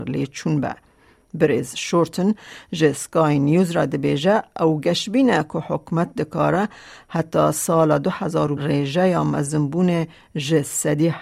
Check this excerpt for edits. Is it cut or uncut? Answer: cut